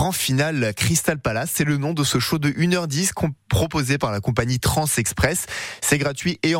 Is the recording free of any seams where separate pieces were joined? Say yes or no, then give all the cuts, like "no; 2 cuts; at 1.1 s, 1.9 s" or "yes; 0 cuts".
yes; 0 cuts